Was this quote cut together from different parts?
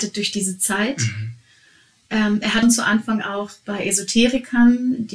yes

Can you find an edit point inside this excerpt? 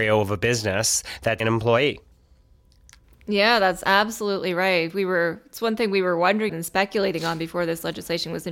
yes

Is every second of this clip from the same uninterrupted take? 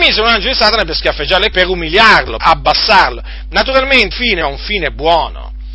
no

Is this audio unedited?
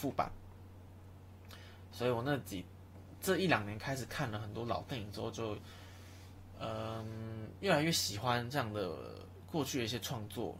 yes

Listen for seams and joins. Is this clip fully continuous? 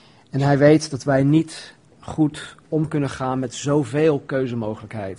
no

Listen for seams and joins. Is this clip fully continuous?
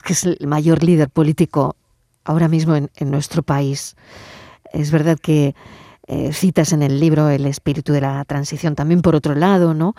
yes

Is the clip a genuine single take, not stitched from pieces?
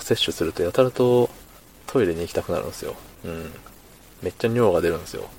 no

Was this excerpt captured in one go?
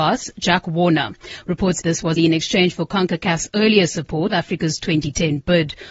no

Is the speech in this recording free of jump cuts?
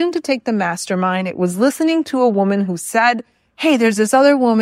yes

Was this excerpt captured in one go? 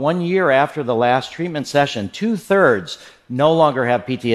yes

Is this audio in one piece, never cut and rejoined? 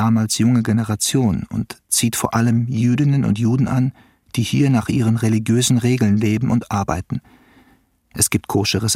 yes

